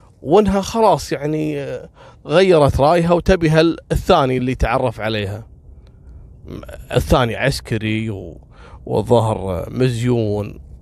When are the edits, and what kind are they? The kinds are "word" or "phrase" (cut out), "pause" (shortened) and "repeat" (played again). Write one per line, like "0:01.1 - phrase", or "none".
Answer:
none